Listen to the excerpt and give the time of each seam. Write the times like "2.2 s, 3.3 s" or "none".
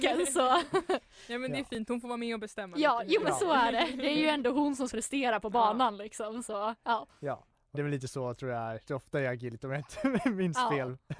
4.9 s, 7.7 s, 8.8 s